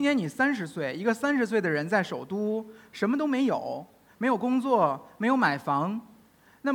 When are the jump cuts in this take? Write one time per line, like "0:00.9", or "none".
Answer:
none

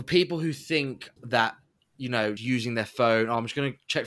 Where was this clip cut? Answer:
0:01.2
0:02.4

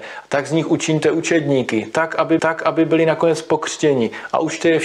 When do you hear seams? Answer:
0:02.4

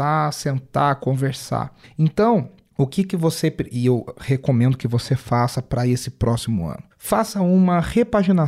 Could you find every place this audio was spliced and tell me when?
none

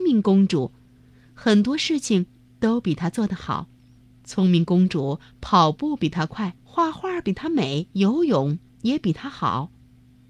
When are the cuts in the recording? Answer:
0:04.0
0:06.6
0:07.9

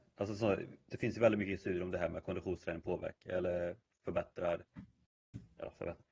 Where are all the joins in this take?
none

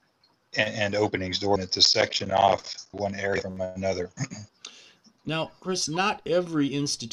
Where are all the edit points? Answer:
0:01.6
0:02.9
0:04.5

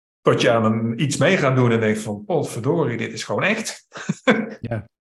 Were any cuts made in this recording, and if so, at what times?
none

